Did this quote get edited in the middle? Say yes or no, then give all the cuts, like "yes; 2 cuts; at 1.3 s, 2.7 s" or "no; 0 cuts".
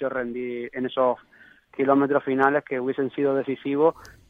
no; 0 cuts